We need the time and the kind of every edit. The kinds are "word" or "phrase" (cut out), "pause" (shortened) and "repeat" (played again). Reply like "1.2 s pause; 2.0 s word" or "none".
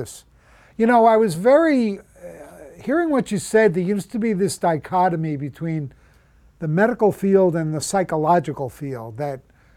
none